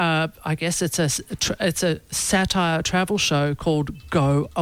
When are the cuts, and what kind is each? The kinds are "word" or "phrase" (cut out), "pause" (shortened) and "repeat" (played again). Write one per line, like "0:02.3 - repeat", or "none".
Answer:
none